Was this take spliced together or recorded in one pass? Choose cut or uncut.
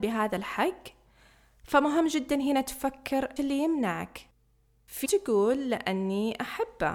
cut